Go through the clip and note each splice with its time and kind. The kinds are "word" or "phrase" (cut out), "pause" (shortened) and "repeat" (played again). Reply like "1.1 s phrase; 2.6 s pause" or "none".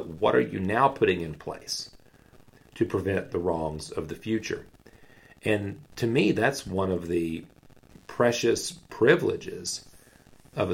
none